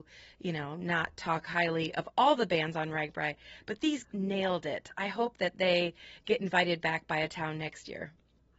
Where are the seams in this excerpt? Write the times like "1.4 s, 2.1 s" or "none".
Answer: 4.0 s